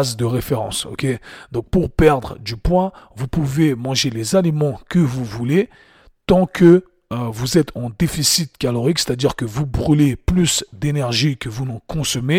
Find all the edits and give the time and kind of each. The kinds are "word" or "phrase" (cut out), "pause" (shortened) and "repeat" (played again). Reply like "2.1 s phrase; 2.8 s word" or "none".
none